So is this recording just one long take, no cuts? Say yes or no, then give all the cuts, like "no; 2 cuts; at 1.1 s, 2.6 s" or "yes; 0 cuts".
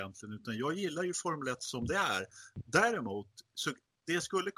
yes; 0 cuts